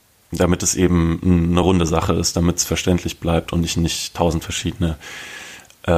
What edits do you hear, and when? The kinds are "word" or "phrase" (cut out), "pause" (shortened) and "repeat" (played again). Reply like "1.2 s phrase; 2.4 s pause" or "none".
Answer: none